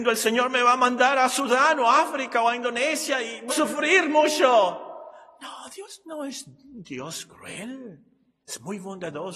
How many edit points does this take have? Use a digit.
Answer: 1